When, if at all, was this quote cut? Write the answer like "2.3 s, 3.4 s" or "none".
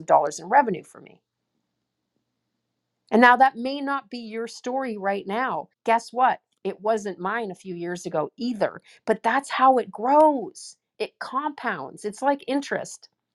5.7 s